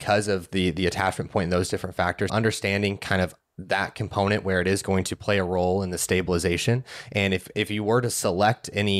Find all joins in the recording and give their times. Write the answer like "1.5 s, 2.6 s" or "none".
2.3 s